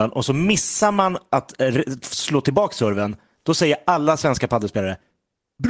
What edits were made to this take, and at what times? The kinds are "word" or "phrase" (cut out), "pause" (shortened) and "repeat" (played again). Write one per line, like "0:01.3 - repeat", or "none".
none